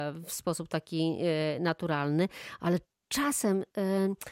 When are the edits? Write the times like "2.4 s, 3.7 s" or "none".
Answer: none

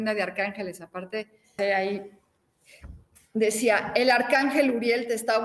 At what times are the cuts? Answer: 1.6 s

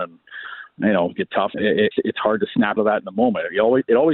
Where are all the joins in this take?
1.2 s, 1.5 s, 1.9 s, 2.8 s

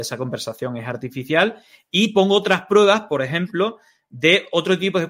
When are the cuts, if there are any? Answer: none

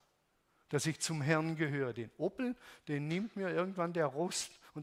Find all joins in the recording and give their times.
none

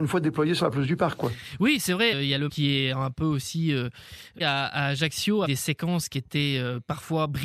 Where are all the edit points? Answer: 2.1 s, 2.5 s, 4.4 s, 5.4 s

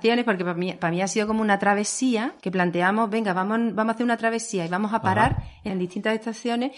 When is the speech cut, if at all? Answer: 2.4 s, 5.7 s

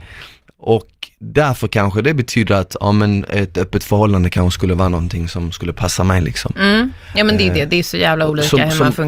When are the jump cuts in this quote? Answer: none

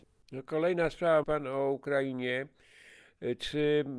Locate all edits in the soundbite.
1.2 s

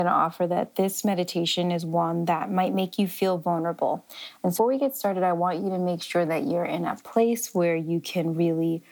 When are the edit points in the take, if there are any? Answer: 4.6 s

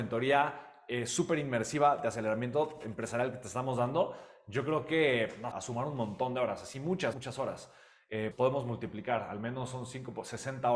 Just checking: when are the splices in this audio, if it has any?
5.5 s, 7.1 s, 8.3 s

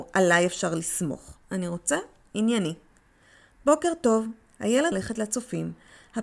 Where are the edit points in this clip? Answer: 1.4 s, 4.9 s

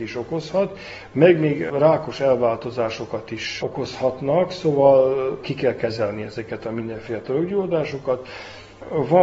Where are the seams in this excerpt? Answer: none

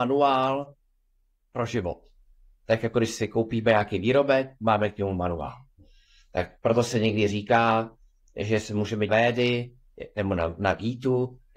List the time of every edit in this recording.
9.1 s

